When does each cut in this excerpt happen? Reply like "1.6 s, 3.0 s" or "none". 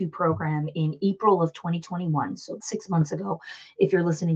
2.6 s